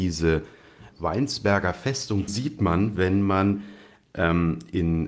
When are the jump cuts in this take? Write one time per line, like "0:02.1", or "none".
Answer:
0:00.9
0:02.3